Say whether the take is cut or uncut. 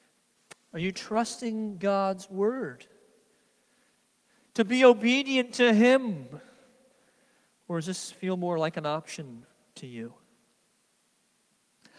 uncut